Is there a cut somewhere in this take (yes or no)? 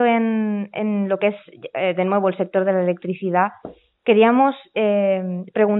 no